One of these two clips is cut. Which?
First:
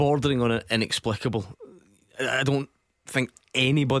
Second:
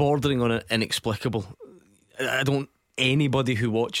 second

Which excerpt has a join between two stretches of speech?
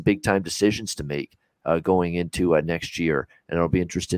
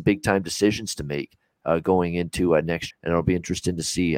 second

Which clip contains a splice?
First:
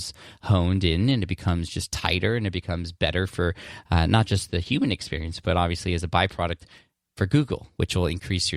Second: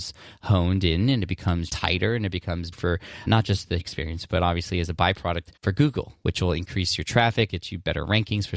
second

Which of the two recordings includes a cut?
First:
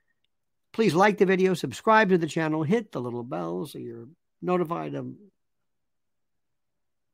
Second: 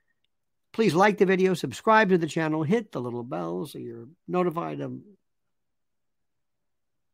second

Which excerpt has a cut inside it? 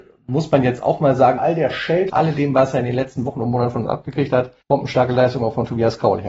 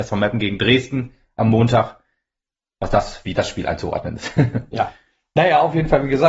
first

